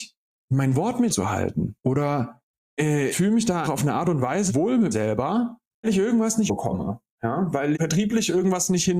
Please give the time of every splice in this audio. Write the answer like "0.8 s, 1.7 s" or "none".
1.1 s, 3.1 s, 3.6 s, 4.5 s, 4.9 s, 5.8 s, 6.5 s, 7.7 s